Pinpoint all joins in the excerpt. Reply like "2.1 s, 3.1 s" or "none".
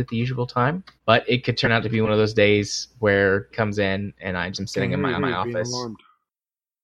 1.0 s, 3.5 s, 4.5 s, 5.2 s